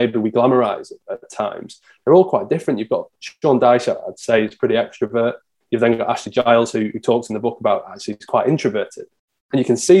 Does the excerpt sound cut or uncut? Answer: uncut